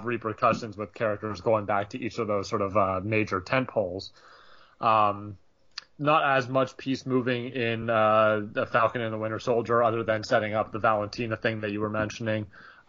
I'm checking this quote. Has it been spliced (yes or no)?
no